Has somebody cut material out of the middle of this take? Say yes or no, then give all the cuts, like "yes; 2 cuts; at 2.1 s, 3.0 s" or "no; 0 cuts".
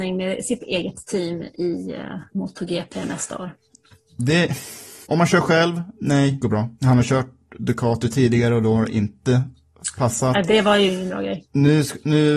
yes; 4 cuts; at 2.3 s, 5.0 s, 6.4 s, 6.7 s